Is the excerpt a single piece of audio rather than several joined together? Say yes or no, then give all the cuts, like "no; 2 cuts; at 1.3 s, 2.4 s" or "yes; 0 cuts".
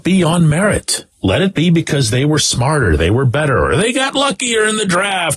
no; 1 cut; at 1.1 s